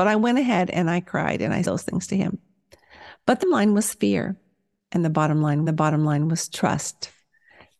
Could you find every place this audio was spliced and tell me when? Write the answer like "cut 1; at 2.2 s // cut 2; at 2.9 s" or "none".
cut 1; at 1.6 s // cut 2; at 3.4 s // cut 3; at 5.7 s